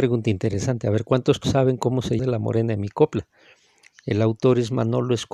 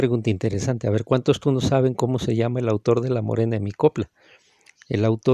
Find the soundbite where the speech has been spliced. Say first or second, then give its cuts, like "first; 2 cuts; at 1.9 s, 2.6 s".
first; 2 cuts; at 1.4 s, 2.2 s